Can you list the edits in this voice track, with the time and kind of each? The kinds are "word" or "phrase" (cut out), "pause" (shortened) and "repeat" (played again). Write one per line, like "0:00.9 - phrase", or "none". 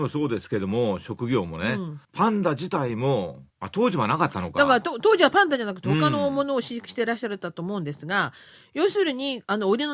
0:02.0 - pause
0:03.5 - pause